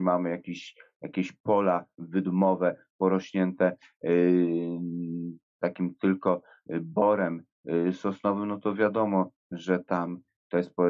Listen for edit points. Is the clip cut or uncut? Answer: uncut